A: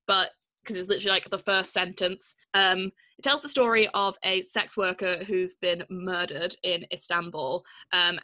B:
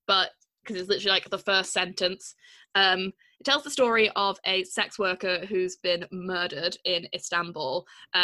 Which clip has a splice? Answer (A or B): A